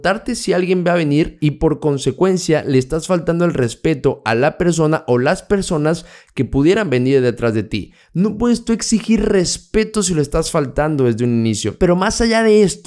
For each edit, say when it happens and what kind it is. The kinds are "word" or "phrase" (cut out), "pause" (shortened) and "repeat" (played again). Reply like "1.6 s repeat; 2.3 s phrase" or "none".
none